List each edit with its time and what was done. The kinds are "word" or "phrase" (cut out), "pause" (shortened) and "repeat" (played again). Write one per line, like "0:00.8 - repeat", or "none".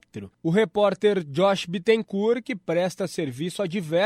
none